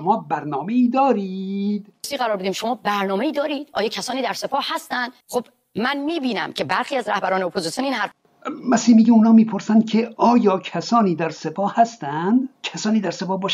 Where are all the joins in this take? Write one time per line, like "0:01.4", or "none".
0:05.2
0:12.5